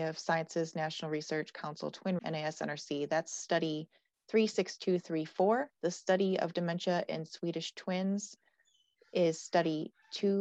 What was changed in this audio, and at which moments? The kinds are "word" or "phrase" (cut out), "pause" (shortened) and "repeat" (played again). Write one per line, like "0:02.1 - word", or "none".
0:02.2 - word
0:05.7 - pause